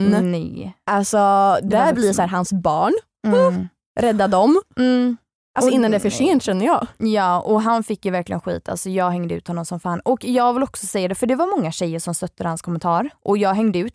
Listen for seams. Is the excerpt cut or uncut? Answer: uncut